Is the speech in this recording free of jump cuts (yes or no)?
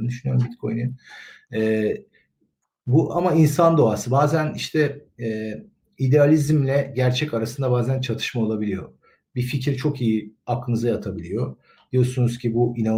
yes